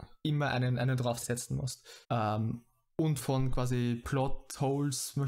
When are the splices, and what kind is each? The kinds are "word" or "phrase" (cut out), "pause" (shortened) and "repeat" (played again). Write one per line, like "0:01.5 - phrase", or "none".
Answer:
0:01.2 - word
0:02.0 - pause
0:03.2 - word